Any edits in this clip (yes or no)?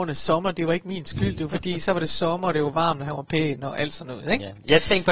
no